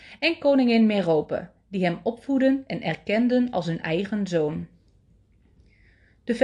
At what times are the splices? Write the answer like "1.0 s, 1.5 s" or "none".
none